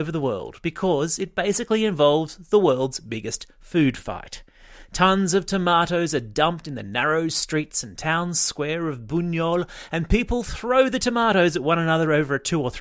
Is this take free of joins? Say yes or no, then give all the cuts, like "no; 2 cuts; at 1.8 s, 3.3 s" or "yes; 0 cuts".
yes; 0 cuts